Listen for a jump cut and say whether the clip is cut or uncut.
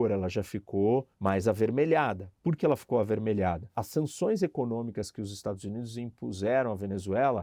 cut